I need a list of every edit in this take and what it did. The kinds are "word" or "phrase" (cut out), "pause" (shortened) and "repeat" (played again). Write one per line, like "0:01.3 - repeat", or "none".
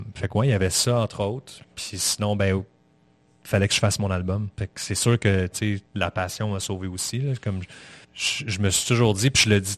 0:01.6 - pause
0:04.5 - pause
0:05.9 - pause
0:08.0 - pause